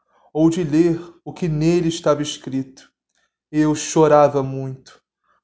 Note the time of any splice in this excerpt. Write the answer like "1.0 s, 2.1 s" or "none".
none